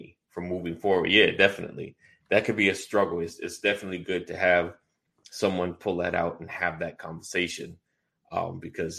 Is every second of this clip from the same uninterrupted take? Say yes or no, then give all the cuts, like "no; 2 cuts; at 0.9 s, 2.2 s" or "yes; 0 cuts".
yes; 0 cuts